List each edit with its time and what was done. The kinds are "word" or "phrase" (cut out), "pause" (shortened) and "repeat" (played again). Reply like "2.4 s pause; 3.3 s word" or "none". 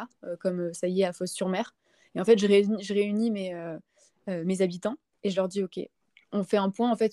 none

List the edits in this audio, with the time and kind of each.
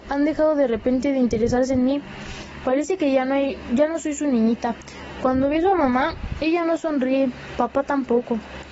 none

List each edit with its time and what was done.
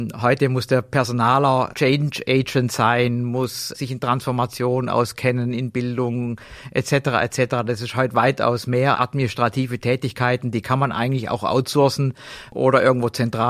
1.7 s word; 3.7 s word; 8.9 s word

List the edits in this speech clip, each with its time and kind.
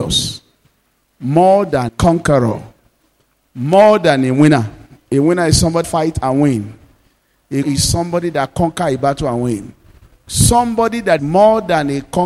1.9 s word; 5.8 s word; 7.6 s word; 11.2 s word

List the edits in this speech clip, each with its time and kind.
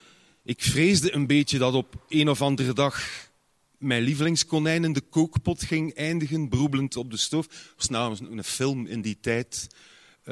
none

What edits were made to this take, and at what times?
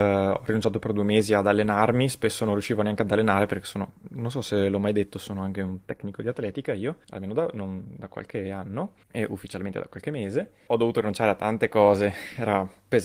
7.0 s pause; 9.0 s pause; 10.7 s phrase

